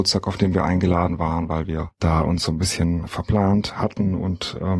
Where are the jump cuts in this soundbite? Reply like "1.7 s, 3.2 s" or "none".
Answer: 1.9 s, 3.1 s